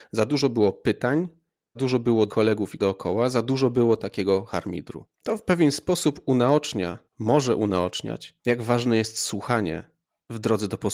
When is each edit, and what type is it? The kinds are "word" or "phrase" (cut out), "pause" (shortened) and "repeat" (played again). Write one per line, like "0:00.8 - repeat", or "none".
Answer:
0:01.8 - word
0:02.3 - word
0:02.8 - word
0:05.1 - pause
0:07.1 - pause
0:08.4 - pause